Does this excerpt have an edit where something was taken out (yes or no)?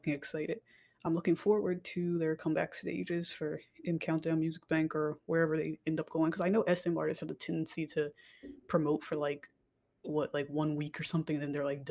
no